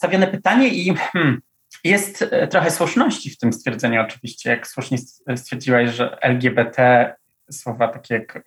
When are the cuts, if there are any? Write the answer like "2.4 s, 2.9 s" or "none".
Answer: none